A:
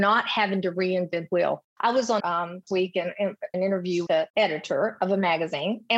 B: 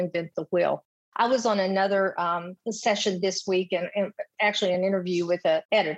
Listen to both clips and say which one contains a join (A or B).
A